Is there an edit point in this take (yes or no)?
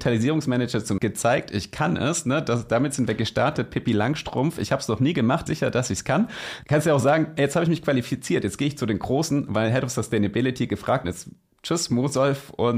yes